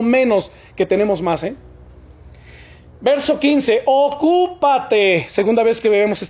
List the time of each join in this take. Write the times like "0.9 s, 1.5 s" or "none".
none